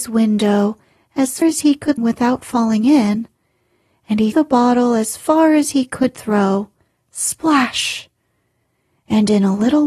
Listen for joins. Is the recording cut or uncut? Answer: cut